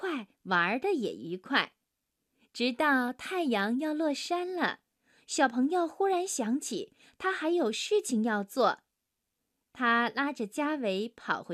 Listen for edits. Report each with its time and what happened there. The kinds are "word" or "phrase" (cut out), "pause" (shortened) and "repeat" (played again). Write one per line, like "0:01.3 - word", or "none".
none